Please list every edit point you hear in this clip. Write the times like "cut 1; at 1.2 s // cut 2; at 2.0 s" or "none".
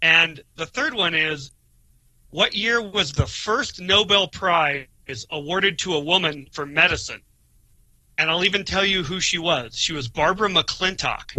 none